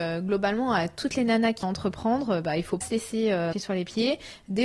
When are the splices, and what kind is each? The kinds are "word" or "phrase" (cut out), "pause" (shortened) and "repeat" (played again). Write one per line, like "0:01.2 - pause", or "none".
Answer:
0:01.6 - word
0:02.8 - word
0:03.5 - word